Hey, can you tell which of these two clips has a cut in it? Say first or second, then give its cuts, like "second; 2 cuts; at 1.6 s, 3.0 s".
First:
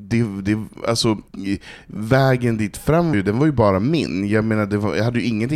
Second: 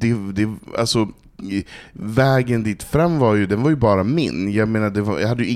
first; 2 cuts; at 1.3 s, 3.1 s